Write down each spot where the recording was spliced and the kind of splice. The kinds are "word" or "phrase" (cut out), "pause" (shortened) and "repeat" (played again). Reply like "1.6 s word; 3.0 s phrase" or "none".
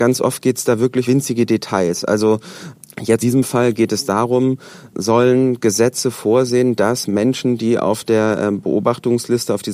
1.1 s word; 3.2 s word